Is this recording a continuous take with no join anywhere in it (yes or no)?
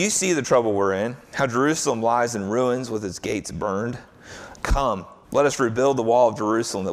no